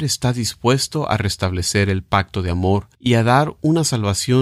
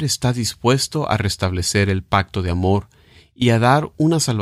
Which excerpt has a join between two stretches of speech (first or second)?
first